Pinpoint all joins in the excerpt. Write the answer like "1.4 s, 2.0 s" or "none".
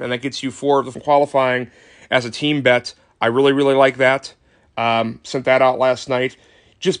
0.9 s

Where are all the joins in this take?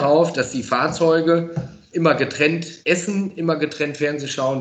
1.9 s, 2.8 s

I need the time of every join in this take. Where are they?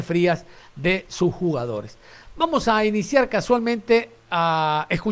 none

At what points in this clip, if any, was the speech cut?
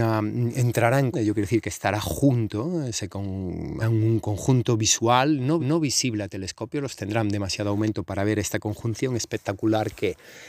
1.1 s, 3.8 s, 5.6 s, 7.0 s

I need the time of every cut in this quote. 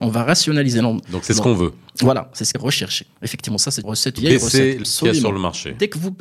2.5 s, 3.8 s, 4.2 s, 4.8 s

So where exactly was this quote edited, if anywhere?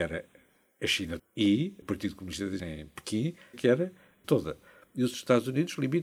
1.2 s, 1.8 s, 2.6 s, 3.5 s, 4.2 s

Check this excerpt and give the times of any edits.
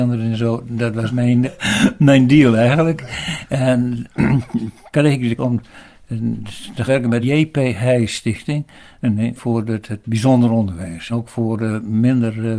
1.1 s, 1.4 s, 4.9 s, 5.4 s, 6.9 s, 7.2 s, 9.4 s, 11.1 s

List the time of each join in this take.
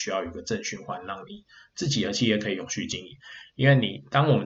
none

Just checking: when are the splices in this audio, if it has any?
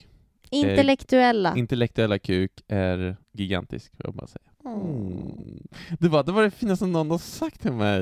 3.2 s, 4.5 s

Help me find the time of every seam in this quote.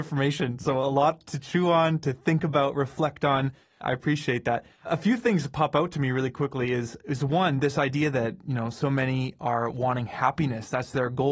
none

